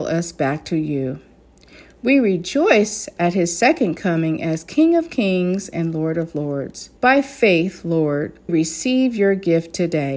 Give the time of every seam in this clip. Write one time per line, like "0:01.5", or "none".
0:07.0
0:08.5